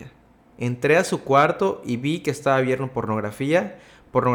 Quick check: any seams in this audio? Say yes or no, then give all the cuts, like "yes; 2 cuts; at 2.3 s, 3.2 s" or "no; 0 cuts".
no; 0 cuts